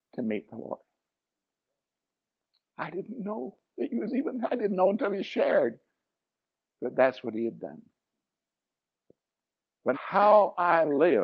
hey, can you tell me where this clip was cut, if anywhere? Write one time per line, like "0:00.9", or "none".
0:09.9